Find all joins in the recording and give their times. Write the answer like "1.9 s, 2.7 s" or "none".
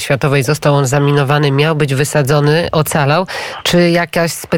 none